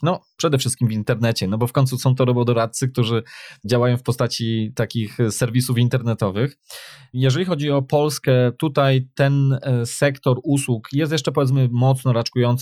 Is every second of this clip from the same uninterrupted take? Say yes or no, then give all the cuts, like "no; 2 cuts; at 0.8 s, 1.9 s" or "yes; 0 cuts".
yes; 0 cuts